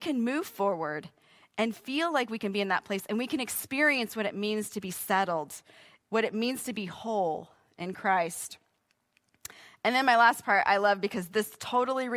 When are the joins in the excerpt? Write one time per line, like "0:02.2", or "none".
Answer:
none